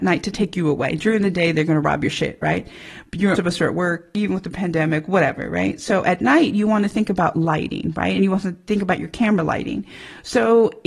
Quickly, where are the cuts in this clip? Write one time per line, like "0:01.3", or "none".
0:03.3